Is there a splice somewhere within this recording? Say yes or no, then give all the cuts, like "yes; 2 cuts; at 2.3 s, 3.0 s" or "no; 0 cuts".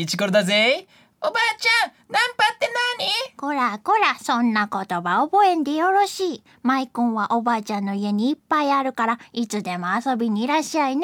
no; 0 cuts